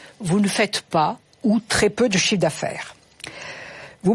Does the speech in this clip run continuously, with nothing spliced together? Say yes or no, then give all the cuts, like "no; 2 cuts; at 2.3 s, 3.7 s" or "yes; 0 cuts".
yes; 0 cuts